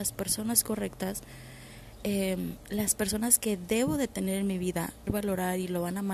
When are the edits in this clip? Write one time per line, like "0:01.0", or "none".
0:05.1